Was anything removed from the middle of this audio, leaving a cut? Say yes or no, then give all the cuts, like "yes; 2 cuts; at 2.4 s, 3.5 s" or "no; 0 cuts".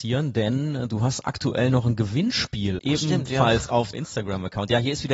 yes; 2 cuts; at 2.8 s, 3.9 s